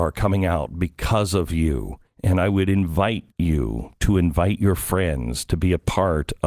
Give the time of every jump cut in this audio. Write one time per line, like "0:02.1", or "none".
0:02.1
0:03.3